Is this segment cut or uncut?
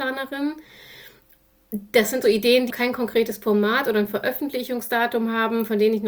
cut